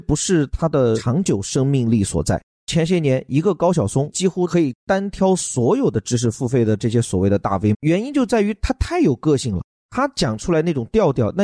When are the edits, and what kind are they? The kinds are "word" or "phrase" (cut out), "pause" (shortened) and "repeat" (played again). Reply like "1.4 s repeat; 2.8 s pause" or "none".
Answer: 7.7 s word